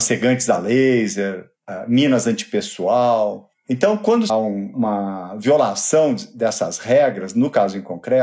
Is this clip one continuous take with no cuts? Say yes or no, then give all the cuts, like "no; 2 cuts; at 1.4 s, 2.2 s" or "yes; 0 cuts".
no; 1 cut; at 4.3 s